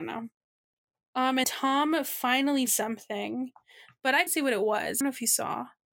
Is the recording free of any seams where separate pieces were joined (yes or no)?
no